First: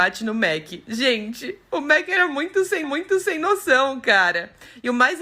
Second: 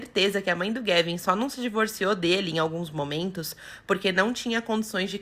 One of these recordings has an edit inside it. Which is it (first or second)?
first